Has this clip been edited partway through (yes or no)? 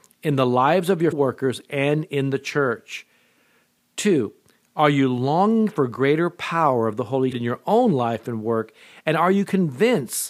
yes